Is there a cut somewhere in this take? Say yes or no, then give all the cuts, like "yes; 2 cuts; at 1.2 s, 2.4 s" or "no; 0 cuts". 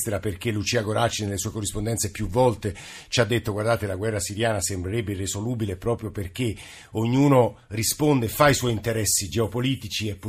no; 0 cuts